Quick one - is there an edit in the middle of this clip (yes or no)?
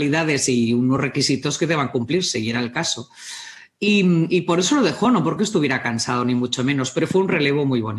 no